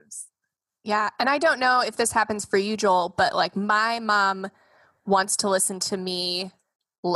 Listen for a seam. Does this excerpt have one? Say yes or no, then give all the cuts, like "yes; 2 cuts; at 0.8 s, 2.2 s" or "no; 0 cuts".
no; 0 cuts